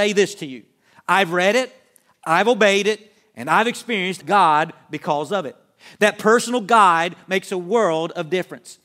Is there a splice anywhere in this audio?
yes; 1 cut; at 4.2 s

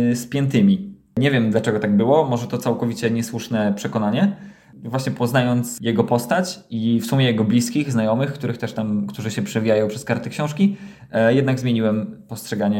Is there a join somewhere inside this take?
no; 0 cuts

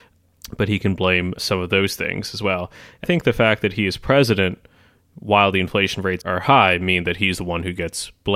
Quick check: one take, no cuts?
no; 3 cuts; at 1.4 s, 3.0 s, 6.2 s

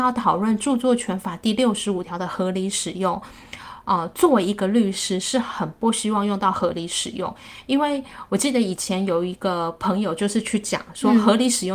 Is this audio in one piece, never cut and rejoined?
yes; 0 cuts

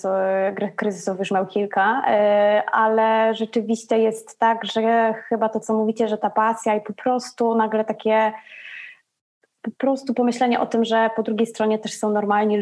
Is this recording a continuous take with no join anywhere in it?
yes; 0 cuts

